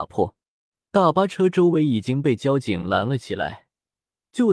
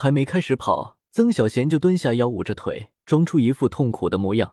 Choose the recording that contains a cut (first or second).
second